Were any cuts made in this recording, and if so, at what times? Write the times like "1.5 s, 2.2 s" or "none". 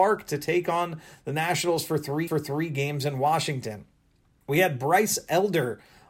2.3 s